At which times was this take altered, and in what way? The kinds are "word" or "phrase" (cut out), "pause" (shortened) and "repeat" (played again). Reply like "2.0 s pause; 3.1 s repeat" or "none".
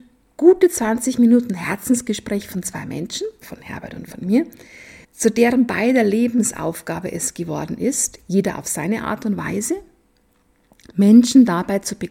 3.4 s word; 5.0 s pause